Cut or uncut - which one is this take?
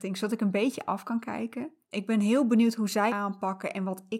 cut